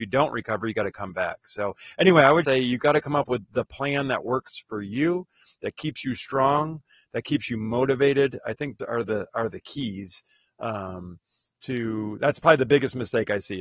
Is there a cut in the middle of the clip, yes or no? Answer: yes